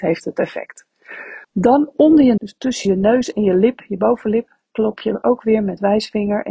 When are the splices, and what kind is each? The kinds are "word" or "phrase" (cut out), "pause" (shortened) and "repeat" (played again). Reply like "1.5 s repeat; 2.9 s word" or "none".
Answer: 1.4 s pause; 2.4 s word